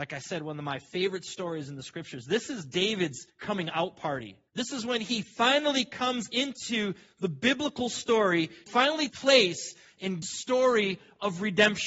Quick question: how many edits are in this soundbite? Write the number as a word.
five